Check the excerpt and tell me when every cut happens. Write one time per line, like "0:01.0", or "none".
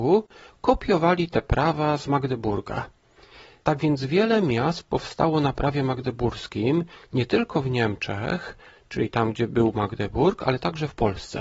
none